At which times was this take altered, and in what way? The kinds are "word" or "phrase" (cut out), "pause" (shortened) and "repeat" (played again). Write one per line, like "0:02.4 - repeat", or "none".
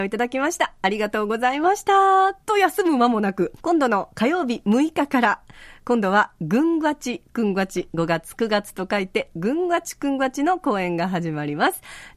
0:02.4 - pause
0:03.6 - pause